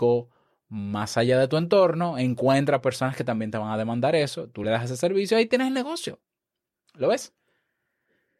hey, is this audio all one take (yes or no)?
yes